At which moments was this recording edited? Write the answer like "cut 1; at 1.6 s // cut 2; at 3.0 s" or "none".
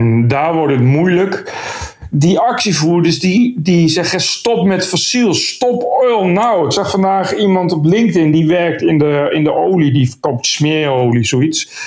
none